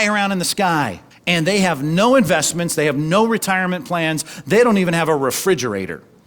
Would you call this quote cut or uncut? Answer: cut